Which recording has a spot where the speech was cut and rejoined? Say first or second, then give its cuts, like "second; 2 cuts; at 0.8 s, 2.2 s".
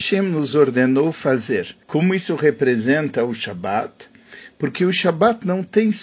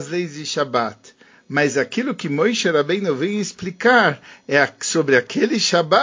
first; 1 cut; at 1.8 s